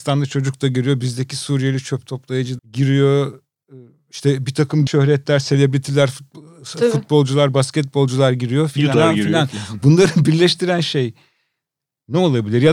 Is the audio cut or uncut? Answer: cut